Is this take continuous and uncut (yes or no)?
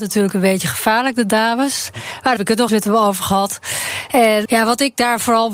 no